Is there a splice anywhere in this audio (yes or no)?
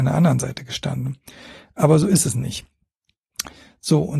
no